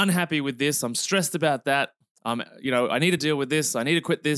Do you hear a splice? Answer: no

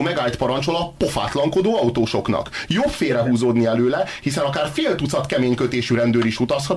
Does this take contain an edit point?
no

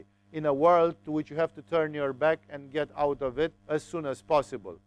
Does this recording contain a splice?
yes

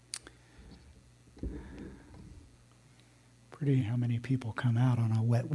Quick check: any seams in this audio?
yes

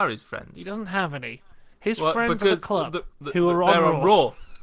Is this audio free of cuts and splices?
no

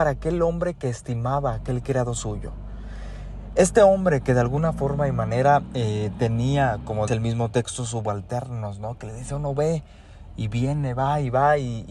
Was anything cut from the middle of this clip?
yes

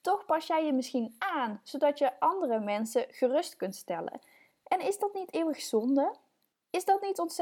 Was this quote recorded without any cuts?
yes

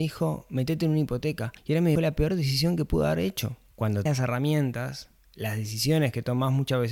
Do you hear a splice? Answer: yes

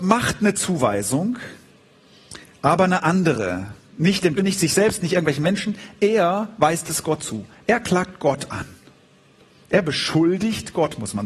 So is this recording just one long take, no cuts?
no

